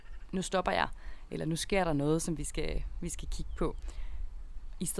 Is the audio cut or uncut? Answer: uncut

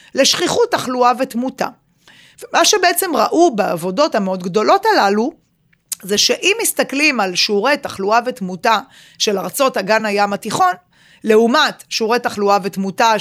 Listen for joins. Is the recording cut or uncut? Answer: uncut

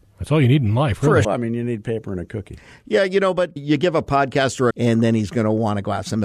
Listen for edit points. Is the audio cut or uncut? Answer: cut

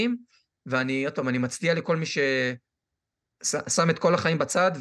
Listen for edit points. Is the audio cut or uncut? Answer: uncut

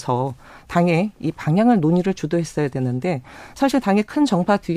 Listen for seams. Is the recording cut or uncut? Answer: uncut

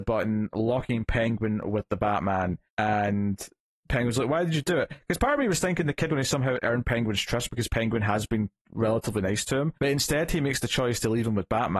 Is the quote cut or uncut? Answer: cut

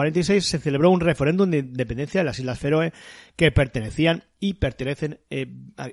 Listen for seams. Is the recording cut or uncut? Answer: uncut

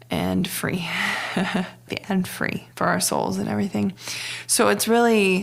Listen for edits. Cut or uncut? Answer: cut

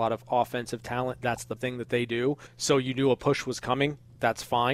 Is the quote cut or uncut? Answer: cut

